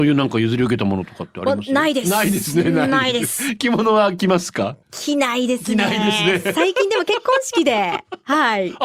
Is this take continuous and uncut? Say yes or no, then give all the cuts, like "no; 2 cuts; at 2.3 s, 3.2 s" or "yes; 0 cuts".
no; 1 cut; at 4.8 s